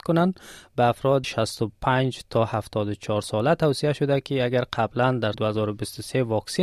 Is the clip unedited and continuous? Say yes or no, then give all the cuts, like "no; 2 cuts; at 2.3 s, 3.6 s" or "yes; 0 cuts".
no; 2 cuts; at 1.2 s, 5.3 s